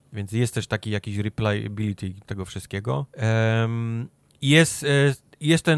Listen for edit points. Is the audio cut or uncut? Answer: cut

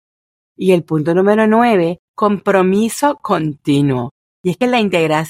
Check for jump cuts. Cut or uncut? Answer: cut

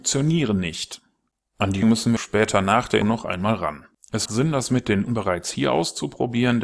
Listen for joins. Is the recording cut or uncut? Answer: cut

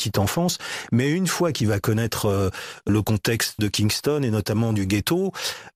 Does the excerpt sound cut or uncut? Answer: cut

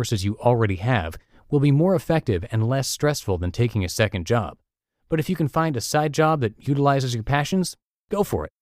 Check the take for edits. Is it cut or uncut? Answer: uncut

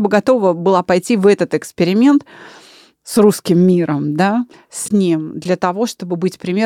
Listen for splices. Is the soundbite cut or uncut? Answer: uncut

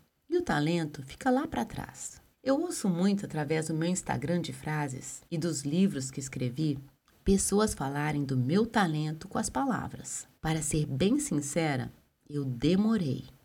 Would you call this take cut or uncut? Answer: cut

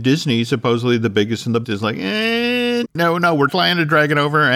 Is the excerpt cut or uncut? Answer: cut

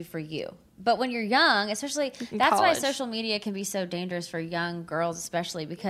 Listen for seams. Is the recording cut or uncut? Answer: uncut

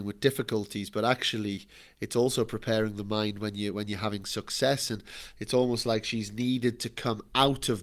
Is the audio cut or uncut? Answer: uncut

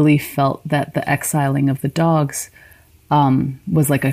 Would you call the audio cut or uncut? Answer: uncut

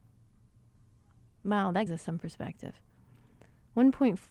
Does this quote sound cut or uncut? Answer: cut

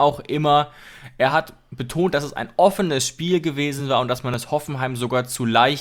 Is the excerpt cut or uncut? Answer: uncut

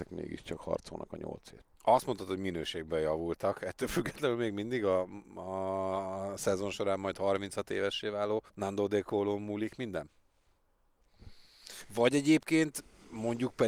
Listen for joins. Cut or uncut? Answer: cut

